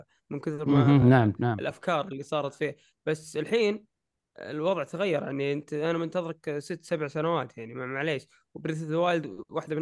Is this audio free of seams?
yes; 0 cuts

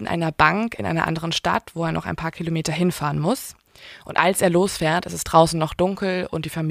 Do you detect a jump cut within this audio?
no; 0 cuts

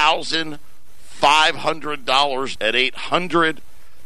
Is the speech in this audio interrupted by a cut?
yes; 1 cut; at 2.6 s

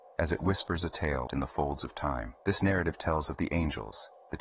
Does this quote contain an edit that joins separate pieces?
yes; 2 cuts; at 1.3 s, 2.4 s

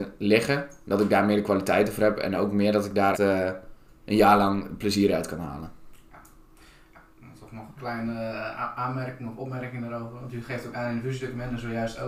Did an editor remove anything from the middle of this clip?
yes; 1 cut; at 3.1 s

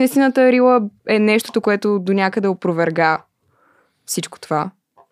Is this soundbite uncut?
no; 1 cut; at 1.0 s

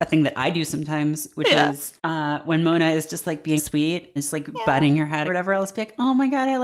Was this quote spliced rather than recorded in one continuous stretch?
yes; 4 cuts; at 2.0 s, 3.6 s, 4.2 s, 5.3 s

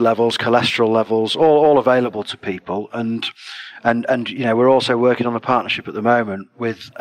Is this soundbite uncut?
yes; 0 cuts

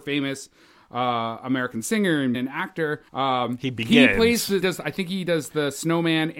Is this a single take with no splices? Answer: no; 3 cuts; at 2.3 s, 3.1 s, 4.6 s

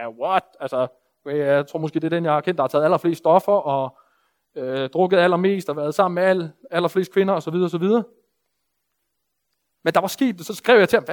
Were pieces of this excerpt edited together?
no; 0 cuts

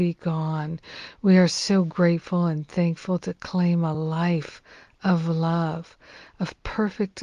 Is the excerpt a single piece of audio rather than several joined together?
yes; 0 cuts

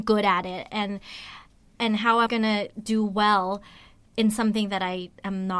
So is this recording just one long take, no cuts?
no; 1 cut; at 2.3 s

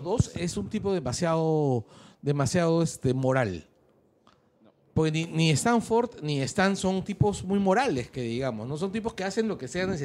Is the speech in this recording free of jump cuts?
yes; 0 cuts

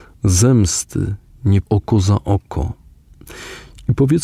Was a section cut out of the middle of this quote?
yes; 1 cut; at 1.6 s

